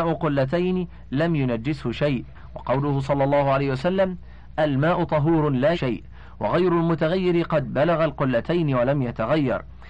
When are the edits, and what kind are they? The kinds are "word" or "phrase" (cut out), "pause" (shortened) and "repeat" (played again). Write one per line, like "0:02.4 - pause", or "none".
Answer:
0:05.7 - word